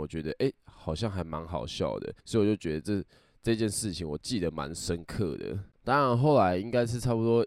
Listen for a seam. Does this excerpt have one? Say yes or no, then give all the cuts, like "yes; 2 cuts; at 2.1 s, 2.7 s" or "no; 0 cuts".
yes; 2 cuts; at 2.2 s, 5.7 s